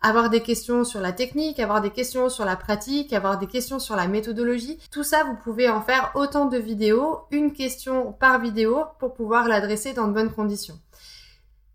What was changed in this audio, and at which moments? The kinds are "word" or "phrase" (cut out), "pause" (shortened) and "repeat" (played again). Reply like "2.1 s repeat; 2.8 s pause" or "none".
4.9 s pause